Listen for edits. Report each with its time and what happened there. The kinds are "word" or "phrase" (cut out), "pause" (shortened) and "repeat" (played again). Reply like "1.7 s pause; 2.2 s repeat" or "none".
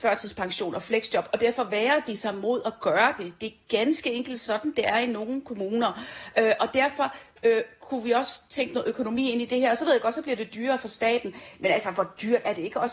none